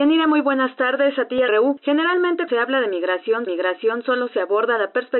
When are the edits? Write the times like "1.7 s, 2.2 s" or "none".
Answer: 1.5 s, 2.5 s, 3.5 s